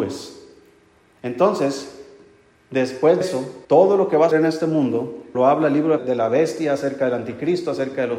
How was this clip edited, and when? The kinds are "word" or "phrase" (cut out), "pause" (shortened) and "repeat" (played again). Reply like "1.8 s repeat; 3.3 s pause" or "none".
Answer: 3.2 s word; 3.6 s pause; 4.3 s word; 5.3 s word; 6.0 s phrase

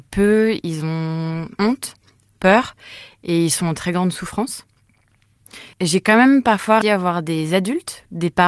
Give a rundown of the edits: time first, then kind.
1.6 s word; 5.7 s pause; 6.8 s word

